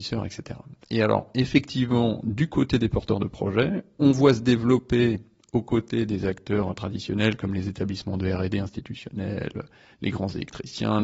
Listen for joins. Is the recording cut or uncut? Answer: uncut